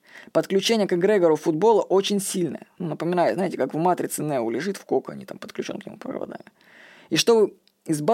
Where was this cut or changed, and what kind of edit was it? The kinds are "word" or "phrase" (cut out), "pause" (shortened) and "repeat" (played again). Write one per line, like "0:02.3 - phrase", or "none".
none